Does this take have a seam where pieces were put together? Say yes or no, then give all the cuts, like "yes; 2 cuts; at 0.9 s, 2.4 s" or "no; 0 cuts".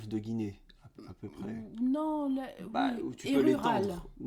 no; 0 cuts